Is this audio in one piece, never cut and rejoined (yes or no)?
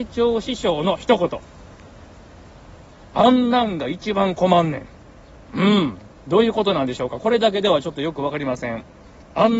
no